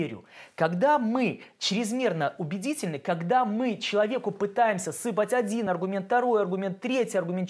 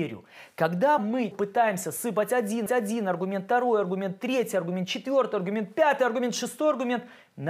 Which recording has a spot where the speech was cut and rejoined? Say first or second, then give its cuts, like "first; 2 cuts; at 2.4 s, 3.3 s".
second; 3 cuts; at 1.0 s, 1.3 s, 2.7 s